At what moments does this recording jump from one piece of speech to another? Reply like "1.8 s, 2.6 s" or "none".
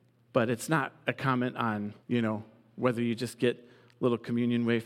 2.0 s